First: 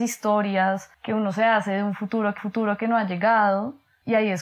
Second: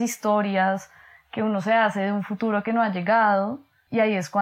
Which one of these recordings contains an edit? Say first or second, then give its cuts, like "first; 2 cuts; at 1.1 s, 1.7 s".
first; 2 cuts; at 0.9 s, 2.4 s